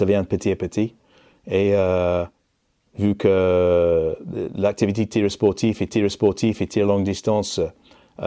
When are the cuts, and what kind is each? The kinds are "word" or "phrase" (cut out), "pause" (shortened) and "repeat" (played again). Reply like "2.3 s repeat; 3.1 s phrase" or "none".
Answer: 5.9 s repeat